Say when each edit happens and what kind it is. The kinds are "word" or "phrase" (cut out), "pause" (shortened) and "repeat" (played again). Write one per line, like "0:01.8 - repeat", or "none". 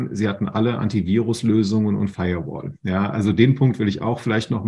none